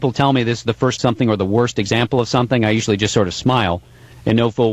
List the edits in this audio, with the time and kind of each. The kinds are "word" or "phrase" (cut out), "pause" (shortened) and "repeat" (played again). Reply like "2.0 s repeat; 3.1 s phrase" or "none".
1.0 s word